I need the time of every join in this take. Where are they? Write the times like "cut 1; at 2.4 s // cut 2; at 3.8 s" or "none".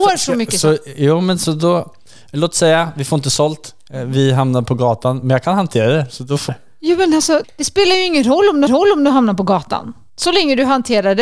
cut 1; at 6.5 s // cut 2; at 7.4 s // cut 3; at 8.7 s